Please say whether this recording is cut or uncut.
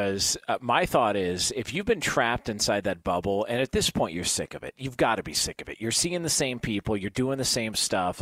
uncut